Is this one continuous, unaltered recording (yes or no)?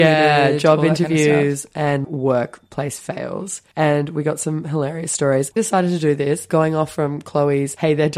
no